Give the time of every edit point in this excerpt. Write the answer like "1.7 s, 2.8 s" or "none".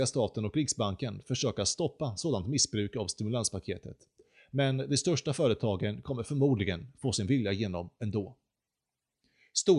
none